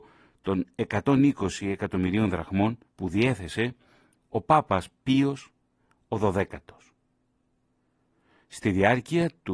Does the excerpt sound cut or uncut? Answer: cut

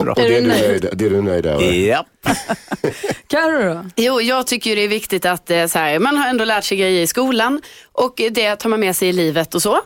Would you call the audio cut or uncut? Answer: uncut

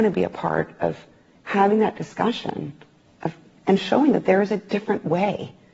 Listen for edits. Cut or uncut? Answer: uncut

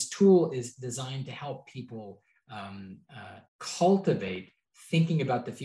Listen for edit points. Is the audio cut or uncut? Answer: cut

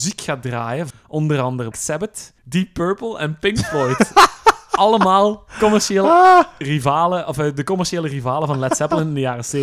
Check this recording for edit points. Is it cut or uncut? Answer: cut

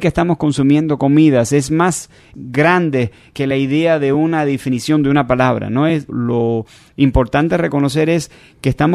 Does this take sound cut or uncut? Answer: uncut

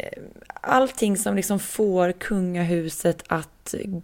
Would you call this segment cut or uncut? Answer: uncut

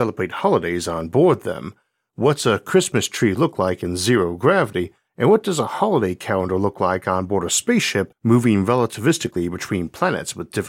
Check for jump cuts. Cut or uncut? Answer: uncut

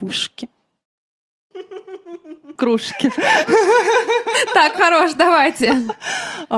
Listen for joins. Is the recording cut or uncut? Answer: cut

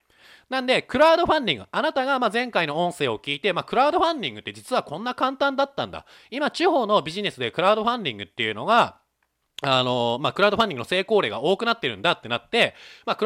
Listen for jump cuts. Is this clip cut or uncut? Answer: uncut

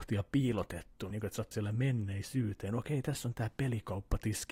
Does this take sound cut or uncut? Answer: cut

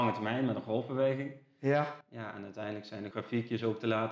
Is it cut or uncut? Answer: cut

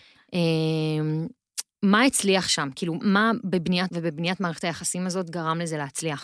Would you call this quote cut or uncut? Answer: cut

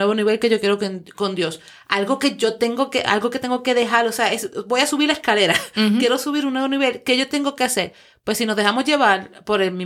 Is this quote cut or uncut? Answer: uncut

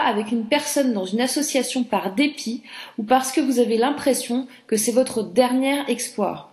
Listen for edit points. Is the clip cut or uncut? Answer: uncut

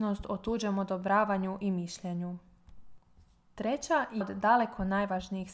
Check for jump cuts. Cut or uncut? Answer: cut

